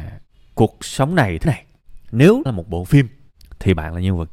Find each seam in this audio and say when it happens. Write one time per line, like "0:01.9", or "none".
0:01.4
0:02.5